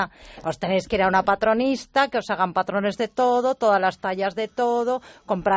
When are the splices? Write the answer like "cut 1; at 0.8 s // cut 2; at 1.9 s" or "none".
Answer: none

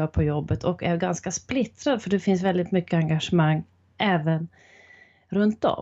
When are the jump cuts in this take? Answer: none

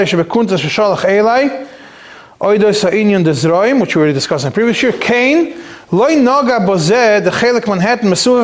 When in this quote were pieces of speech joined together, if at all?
none

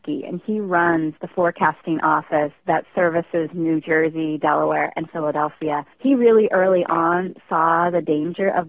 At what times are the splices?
cut 1; at 1.2 s // cut 2; at 5.9 s

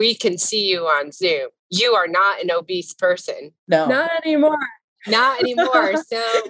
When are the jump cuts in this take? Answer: none

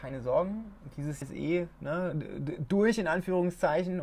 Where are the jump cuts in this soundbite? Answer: cut 1; at 1.2 s

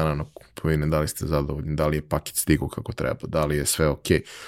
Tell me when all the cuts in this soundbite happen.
none

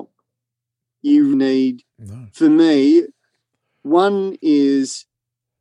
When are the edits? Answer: cut 1; at 1.3 s

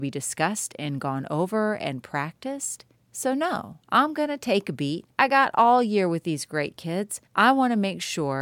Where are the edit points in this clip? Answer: cut 1; at 2.9 s // cut 2; at 3.8 s // cut 3; at 5.1 s // cut 4; at 7.3 s

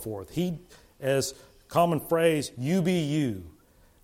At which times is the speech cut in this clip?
none

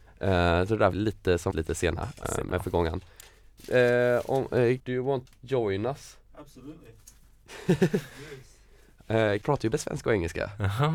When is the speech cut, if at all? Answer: cut 1; at 0.9 s // cut 2; at 1.5 s // cut 3; at 2.2 s // cut 4; at 4.8 s // cut 5; at 5.3 s // cut 6; at 9.4 s // cut 7; at 9.7 s

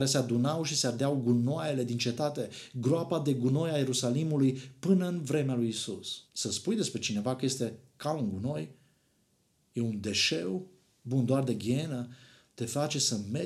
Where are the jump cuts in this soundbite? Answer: cut 1; at 6.3 s

